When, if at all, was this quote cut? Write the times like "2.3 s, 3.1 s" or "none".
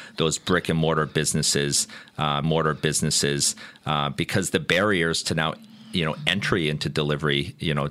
2.4 s